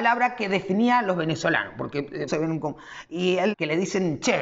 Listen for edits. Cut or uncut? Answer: cut